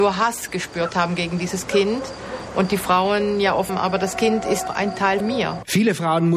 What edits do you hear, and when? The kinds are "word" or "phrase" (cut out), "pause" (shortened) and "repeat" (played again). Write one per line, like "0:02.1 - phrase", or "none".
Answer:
0:03.7 - phrase
0:04.7 - word
0:05.2 - word